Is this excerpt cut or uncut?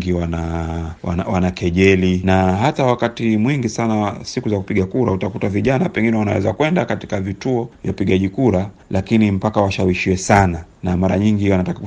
uncut